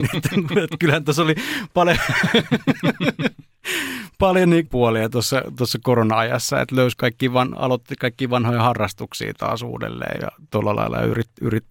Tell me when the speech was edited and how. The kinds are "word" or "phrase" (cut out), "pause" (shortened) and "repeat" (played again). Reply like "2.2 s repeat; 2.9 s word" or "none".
4.7 s phrase; 6.9 s word; 10.2 s word